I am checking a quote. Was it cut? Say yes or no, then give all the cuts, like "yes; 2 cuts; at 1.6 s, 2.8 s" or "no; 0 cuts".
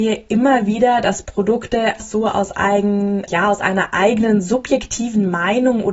yes; 2 cuts; at 2.0 s, 3.3 s